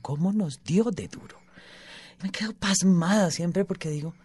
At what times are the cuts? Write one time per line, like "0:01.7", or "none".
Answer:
0:02.2